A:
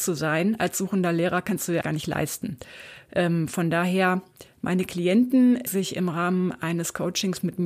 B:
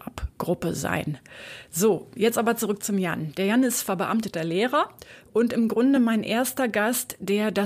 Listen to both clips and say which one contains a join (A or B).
A